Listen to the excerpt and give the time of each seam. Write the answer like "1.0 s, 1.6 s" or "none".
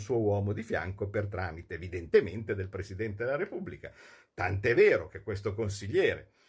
none